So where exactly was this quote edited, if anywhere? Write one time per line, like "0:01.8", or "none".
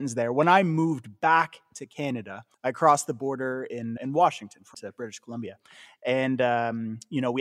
0:02.5
0:04.0
0:04.7